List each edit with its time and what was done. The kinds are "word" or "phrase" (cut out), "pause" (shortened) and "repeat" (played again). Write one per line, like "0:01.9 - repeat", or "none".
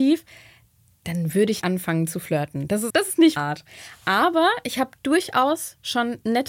0:01.6 - word
0:02.9 - word
0:03.4 - word